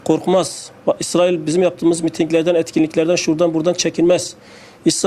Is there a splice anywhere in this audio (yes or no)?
no